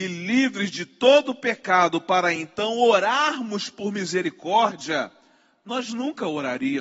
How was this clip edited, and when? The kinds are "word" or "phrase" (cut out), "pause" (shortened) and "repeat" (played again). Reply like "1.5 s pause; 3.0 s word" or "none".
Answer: none